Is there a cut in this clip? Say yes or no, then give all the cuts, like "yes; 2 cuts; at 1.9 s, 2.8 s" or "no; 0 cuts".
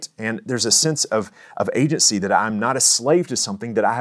no; 0 cuts